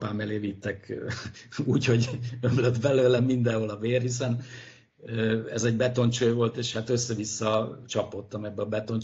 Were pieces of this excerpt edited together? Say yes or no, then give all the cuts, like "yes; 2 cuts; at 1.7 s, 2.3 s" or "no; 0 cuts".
no; 0 cuts